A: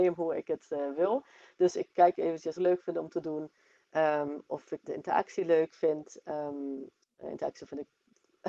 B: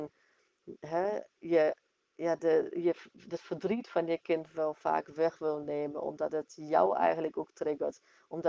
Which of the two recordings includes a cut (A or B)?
A